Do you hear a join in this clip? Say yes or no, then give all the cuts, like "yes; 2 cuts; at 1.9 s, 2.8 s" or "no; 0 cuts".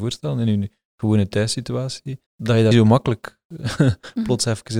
yes; 2 cuts; at 2.3 s, 2.7 s